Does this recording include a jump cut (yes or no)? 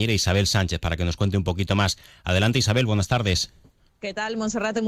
no